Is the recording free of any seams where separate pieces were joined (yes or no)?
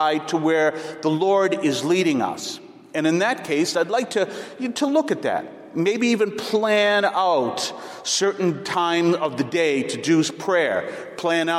yes